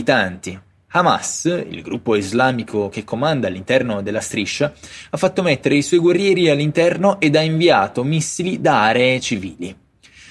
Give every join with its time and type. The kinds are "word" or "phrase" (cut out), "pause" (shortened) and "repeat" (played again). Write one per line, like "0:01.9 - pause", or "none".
none